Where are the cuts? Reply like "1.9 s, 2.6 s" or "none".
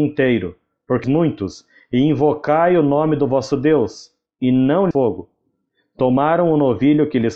1.0 s, 4.9 s